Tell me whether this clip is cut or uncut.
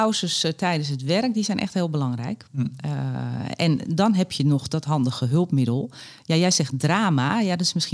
uncut